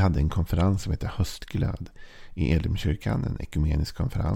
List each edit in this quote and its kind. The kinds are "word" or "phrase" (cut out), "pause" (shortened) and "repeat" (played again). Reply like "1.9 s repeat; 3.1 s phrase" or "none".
none